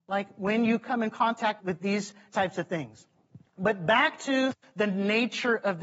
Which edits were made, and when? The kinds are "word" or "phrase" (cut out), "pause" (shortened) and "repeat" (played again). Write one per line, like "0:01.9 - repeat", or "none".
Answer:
0:01.6 - word
0:03.5 - pause